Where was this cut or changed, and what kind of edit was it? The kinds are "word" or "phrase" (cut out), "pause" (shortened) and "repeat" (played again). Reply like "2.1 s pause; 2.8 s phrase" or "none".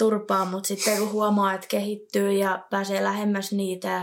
none